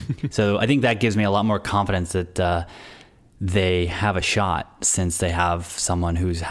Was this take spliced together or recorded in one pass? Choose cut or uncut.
uncut